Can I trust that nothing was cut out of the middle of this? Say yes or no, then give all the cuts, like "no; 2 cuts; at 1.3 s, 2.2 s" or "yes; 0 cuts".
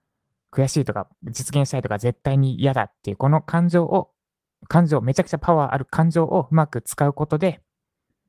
no; 1 cut; at 1.1 s